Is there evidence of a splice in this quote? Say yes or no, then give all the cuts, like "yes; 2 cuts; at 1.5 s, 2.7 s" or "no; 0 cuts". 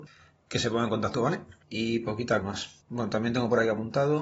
yes; 4 cuts; at 1.1 s, 1.6 s, 2.4 s, 2.8 s